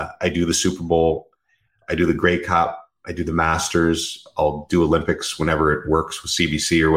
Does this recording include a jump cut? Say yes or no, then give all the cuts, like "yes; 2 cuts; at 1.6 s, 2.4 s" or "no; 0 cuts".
no; 0 cuts